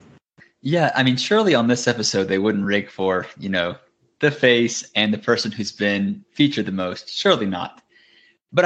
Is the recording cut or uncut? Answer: uncut